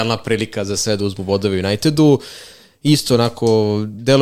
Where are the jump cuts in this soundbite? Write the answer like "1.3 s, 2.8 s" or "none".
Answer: none